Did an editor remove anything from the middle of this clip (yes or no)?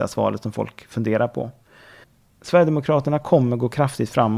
yes